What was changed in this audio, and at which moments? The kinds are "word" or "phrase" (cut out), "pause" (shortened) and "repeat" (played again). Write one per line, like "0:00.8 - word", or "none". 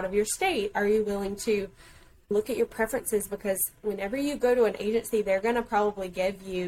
none